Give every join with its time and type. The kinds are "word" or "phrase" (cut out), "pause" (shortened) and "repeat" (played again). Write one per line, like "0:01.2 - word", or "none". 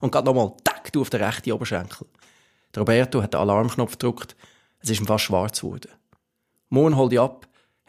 none